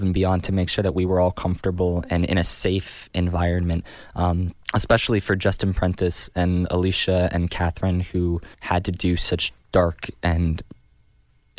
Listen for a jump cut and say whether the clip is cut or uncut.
cut